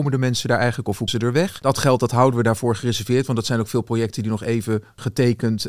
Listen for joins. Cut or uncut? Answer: cut